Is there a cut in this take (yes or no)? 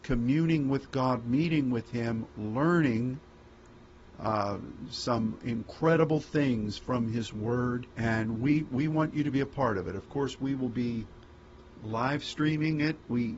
yes